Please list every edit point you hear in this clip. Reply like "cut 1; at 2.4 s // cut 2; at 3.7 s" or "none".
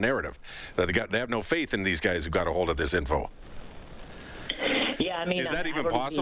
none